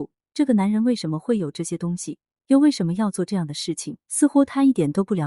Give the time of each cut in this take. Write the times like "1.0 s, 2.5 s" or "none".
4.0 s